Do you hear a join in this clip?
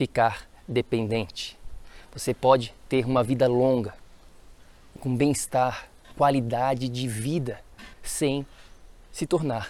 yes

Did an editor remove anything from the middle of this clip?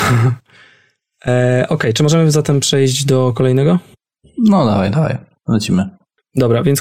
no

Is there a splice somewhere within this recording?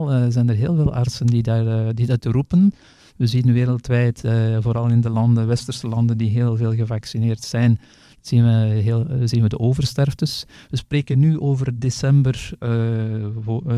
no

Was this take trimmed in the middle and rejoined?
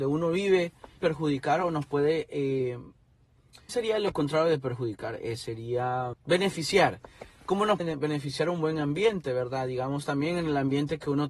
yes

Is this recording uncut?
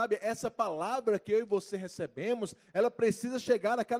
yes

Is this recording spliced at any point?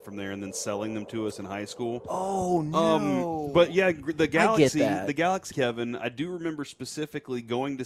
yes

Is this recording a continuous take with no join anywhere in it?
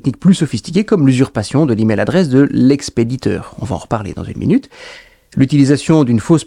yes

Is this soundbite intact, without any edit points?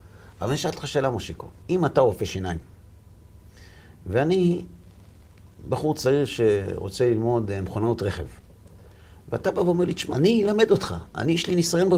no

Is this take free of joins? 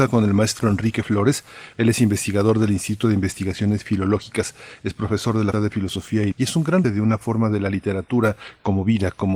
no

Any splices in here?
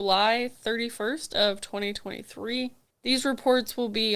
no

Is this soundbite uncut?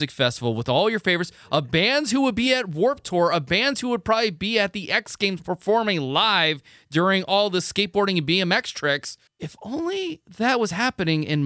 yes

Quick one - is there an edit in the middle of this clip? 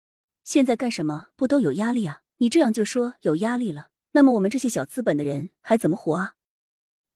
yes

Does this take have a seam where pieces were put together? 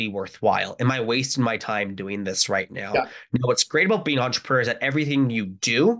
no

